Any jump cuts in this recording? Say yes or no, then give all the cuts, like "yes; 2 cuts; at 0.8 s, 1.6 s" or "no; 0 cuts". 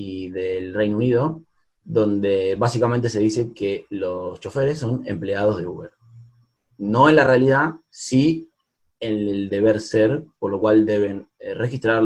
no; 0 cuts